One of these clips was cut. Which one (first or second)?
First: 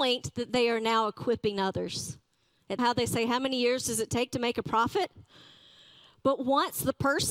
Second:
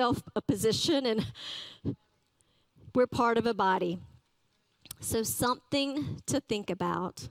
first